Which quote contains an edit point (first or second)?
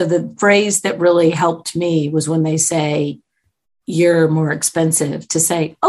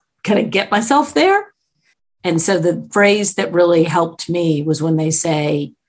second